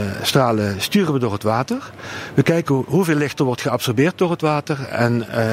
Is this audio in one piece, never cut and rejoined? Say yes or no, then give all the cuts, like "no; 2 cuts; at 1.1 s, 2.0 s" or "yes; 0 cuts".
yes; 0 cuts